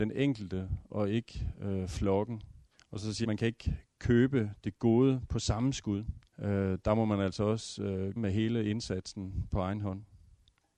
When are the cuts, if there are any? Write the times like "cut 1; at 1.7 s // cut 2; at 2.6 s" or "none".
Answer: cut 1; at 2.7 s // cut 2; at 3.2 s // cut 3; at 6.3 s // cut 4; at 8.2 s